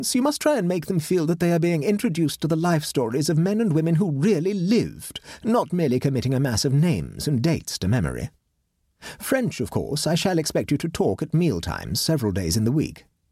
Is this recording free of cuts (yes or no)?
yes